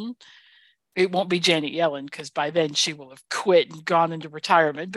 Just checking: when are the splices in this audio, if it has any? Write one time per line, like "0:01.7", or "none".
none